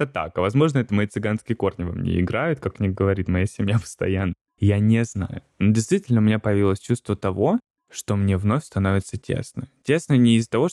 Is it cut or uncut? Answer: uncut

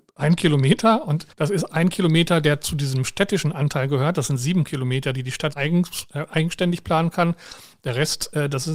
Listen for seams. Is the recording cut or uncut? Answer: cut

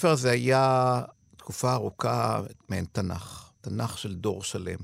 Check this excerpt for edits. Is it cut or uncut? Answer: cut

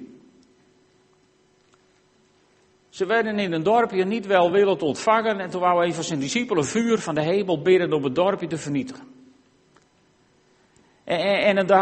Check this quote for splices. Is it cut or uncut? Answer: uncut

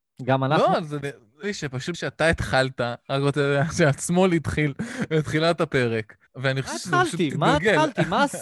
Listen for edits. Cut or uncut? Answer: cut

